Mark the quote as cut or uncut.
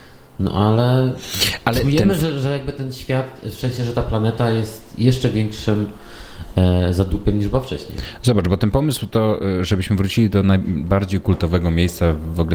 uncut